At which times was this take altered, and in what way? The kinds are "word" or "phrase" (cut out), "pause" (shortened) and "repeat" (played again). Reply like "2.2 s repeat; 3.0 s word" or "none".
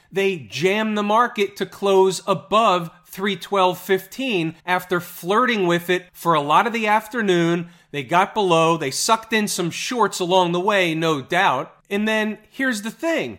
4.6 s pause; 6.1 s pause